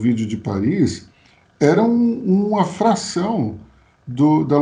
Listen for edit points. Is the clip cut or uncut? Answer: uncut